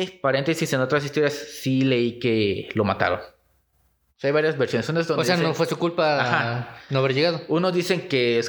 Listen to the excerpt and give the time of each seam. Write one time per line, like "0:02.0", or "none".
none